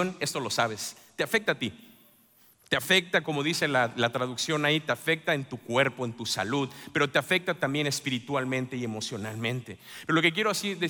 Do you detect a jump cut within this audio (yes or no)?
no